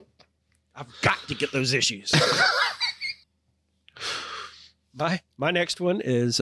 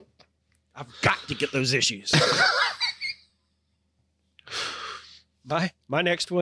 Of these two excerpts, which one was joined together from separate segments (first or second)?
first